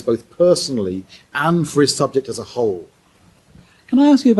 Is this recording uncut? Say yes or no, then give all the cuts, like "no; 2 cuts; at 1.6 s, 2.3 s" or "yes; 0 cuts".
yes; 0 cuts